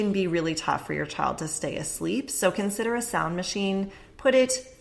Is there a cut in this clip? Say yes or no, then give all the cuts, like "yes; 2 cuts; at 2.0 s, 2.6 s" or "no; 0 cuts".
no; 0 cuts